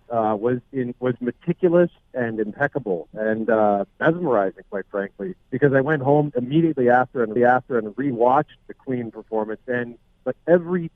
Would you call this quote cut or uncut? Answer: cut